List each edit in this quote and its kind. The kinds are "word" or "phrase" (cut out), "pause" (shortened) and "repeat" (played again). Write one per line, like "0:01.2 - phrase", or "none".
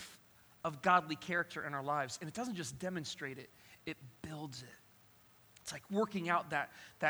none